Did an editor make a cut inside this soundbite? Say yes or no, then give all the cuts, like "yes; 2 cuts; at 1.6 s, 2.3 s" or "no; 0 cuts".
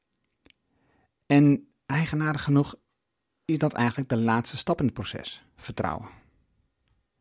no; 0 cuts